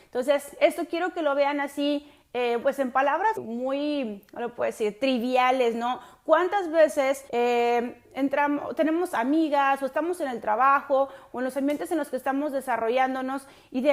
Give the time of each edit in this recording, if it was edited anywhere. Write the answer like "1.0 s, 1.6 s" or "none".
2.6 s, 3.4 s, 7.3 s